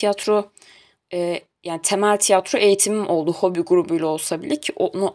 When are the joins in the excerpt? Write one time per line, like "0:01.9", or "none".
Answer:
none